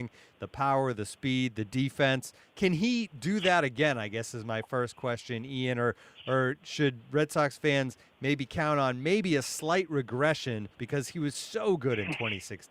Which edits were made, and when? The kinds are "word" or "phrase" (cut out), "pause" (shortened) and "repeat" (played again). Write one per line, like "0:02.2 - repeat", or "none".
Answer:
0:10.7 - pause